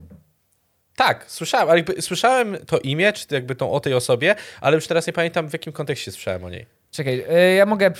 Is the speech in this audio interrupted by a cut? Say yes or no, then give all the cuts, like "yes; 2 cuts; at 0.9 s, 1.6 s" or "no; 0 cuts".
no; 0 cuts